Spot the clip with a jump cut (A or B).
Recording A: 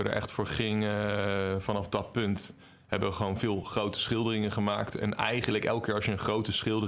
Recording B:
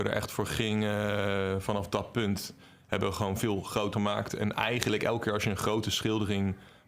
B